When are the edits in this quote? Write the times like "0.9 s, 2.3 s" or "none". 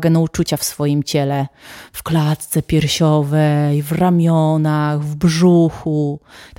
none